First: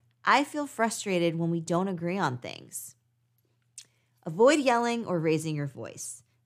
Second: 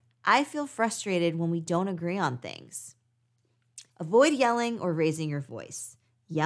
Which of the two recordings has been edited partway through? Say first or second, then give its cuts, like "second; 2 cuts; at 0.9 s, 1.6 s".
second; 1 cut; at 3.9 s